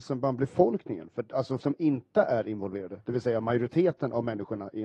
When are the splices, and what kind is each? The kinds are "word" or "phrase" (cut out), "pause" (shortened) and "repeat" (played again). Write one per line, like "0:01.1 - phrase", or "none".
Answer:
0:01.6 - word